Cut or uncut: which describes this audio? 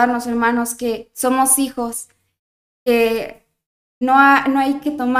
uncut